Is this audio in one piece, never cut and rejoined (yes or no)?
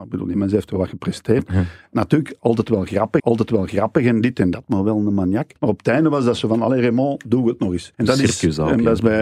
no